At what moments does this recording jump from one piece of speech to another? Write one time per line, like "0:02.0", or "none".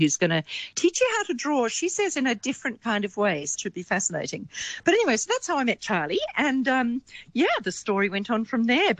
0:03.6